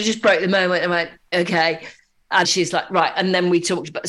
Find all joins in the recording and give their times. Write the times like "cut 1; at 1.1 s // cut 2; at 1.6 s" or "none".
cut 1; at 1.3 s // cut 2; at 2.4 s